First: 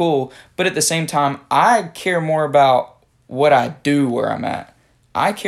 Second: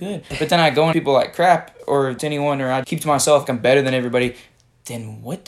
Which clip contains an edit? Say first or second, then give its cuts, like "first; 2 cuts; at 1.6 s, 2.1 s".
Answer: second; 4 cuts; at 0.9 s, 2.2 s, 2.8 s, 3.5 s